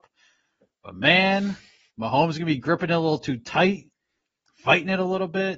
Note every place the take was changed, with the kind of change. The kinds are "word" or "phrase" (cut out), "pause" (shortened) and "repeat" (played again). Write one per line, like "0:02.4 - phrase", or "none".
none